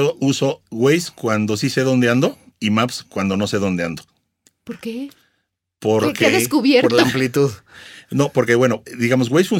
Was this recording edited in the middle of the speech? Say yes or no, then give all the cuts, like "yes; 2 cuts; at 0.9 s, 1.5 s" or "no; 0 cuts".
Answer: no; 0 cuts